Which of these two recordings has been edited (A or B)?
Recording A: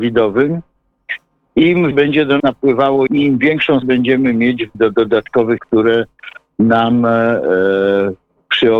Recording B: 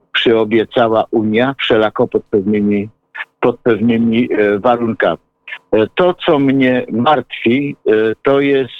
A